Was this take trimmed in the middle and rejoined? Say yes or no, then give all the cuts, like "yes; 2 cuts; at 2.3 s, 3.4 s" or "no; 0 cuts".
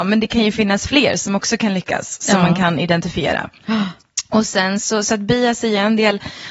no; 0 cuts